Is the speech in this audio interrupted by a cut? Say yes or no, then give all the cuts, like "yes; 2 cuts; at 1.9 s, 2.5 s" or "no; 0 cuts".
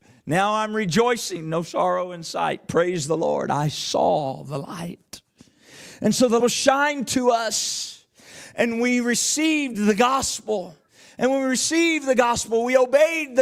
yes; 2 cuts; at 6.4 s, 10.9 s